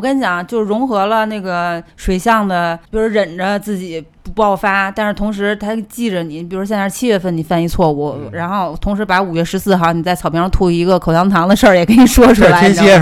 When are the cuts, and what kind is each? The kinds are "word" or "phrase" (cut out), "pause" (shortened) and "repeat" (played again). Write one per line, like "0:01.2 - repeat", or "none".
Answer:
0:01.9 - pause
0:02.9 - pause